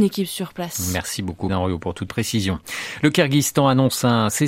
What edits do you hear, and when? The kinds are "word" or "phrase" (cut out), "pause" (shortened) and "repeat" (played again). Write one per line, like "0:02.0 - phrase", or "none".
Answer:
0:01.5 - word
0:02.1 - word